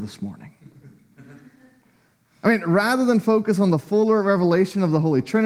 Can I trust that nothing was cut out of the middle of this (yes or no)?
yes